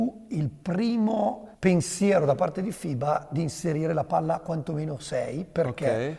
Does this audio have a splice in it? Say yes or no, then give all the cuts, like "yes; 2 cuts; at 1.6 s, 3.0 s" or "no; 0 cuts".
yes; 1 cut; at 1.5 s